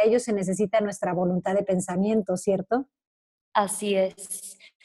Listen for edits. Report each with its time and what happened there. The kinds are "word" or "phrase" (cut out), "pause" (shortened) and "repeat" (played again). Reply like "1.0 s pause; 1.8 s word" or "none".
none